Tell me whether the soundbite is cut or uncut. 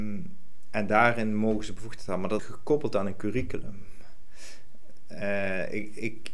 cut